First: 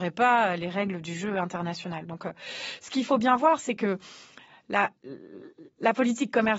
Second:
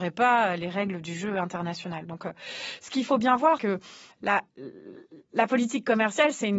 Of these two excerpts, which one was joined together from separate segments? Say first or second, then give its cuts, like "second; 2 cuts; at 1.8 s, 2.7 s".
second; 2 cuts; at 3.6 s, 4.1 s